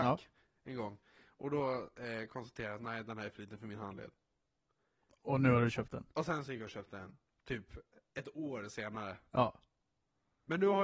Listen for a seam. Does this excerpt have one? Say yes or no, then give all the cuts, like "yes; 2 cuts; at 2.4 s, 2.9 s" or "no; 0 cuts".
no; 0 cuts